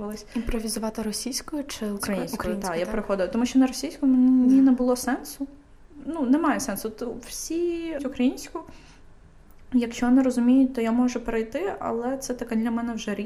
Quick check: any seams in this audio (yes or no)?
yes